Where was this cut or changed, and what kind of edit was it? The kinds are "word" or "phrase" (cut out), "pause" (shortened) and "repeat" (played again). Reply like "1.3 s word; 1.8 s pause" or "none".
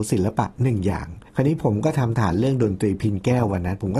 1.3 s pause